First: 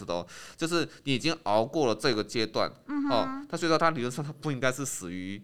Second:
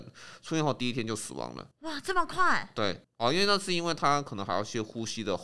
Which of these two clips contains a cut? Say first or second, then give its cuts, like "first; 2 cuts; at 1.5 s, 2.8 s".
second; 2 cuts; at 1.7 s, 3.0 s